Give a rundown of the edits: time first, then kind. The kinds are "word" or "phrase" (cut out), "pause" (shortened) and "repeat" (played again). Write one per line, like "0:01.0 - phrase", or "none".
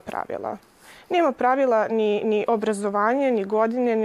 none